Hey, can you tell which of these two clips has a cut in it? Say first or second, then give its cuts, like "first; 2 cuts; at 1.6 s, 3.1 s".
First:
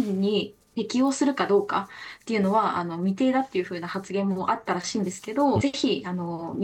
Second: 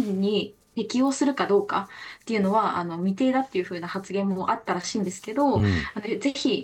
first; 1 cut; at 5.6 s